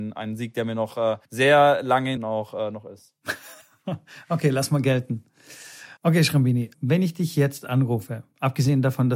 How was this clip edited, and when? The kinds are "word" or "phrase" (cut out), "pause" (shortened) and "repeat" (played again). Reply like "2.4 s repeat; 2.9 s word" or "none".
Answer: 1.2 s pause; 2.2 s phrase; 3.6 s pause; 6.0 s pause; 6.7 s word